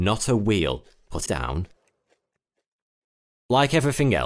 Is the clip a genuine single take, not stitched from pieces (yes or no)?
no